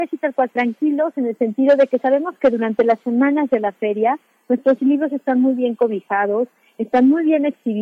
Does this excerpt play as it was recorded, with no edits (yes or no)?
yes